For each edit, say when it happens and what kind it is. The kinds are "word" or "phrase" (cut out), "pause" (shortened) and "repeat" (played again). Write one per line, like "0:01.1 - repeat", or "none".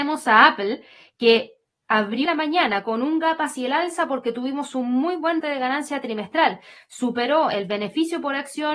0:02.3 - word
0:05.4 - word